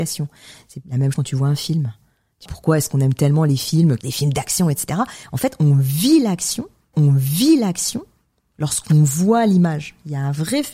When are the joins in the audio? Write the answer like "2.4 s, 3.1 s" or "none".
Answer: 1.1 s, 2.5 s, 4.0 s, 6.9 s